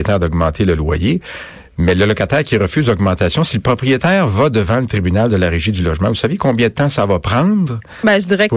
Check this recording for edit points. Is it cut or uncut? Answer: uncut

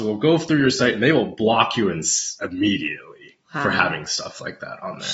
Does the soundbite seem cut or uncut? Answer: cut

